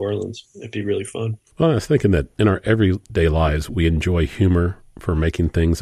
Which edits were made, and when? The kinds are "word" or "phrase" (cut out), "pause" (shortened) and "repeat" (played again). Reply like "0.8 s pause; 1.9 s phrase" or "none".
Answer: 1.5 s pause